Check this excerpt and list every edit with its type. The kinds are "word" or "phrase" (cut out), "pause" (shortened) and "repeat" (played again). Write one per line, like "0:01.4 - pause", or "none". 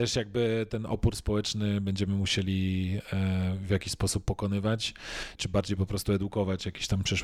0:05.4 - word